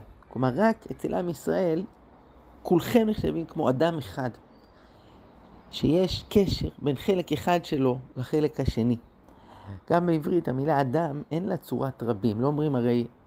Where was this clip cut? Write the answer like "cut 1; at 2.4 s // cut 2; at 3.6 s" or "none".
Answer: none